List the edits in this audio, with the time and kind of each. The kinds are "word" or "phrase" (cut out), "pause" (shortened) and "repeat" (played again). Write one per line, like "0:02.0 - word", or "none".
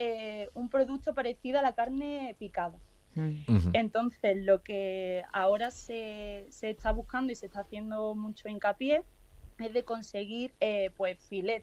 0:09.5 - pause
0:10.5 - pause